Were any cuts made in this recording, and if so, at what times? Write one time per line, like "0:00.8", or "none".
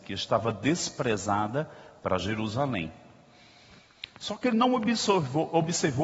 none